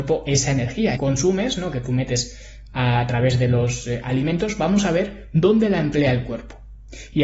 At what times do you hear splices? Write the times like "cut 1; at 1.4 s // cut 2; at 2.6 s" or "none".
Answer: cut 1; at 1.0 s